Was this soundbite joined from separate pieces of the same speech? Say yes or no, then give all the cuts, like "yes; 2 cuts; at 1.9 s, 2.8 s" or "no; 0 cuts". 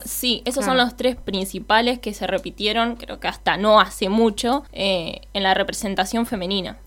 yes; 2 cuts; at 1.2 s, 4.7 s